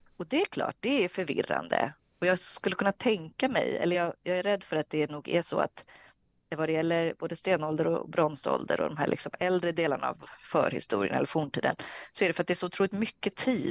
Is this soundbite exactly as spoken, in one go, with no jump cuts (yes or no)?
yes